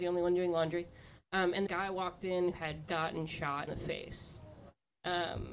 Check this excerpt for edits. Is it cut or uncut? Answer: cut